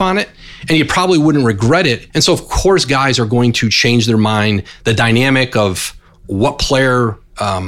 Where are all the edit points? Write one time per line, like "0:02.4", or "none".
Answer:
0:02.1
0:06.1